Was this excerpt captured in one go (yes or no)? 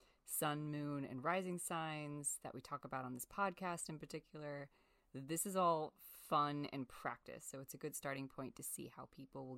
yes